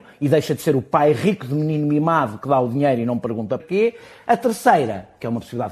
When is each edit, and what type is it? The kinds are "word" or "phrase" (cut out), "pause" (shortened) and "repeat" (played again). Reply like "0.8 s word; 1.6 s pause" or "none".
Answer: 3.6 s word